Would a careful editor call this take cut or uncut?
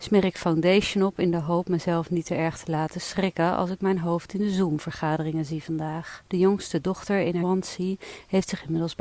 cut